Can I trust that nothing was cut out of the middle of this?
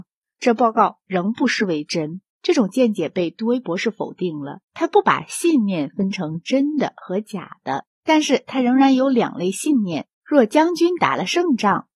no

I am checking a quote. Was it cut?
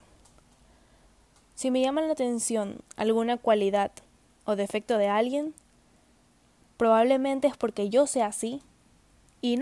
no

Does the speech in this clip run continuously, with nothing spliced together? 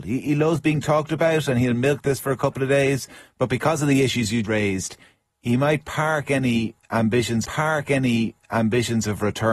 no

